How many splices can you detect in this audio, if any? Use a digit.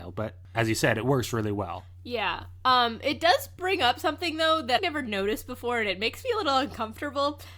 1